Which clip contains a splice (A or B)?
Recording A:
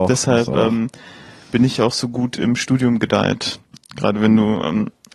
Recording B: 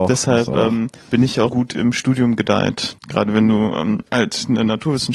B